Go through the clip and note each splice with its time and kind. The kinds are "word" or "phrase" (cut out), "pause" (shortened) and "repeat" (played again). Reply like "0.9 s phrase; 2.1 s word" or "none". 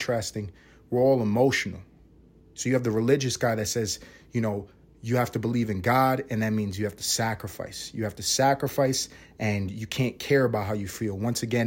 none